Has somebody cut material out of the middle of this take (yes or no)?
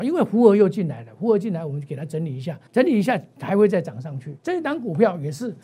yes